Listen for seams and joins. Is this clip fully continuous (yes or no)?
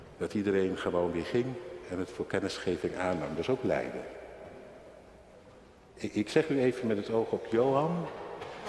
yes